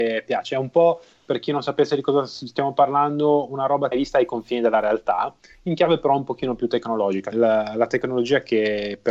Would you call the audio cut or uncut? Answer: cut